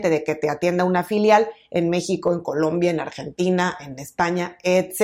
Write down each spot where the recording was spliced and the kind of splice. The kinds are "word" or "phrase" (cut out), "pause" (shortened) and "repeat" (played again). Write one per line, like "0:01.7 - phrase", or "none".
none